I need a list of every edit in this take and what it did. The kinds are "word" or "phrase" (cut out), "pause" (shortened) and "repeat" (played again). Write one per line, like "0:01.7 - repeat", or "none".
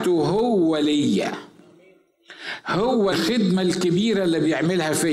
0:03.1 - phrase